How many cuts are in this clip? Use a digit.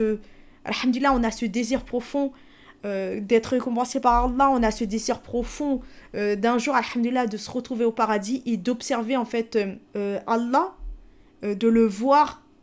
1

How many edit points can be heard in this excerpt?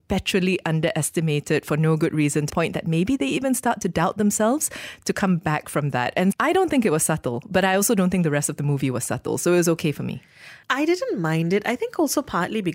3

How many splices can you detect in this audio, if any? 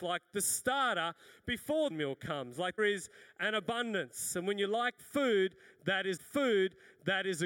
3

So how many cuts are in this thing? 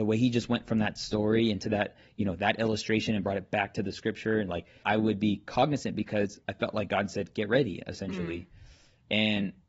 2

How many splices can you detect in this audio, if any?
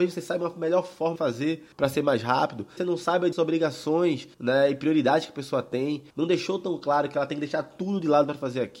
6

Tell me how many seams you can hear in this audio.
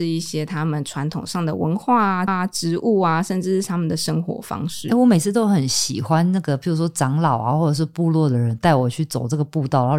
1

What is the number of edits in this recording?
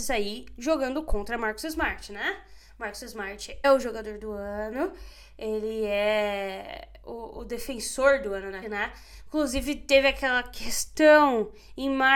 3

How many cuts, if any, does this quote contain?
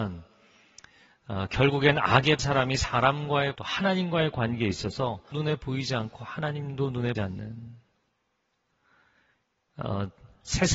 4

